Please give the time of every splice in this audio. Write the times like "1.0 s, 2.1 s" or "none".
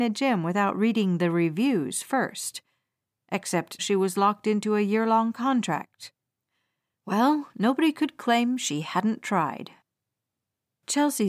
3.8 s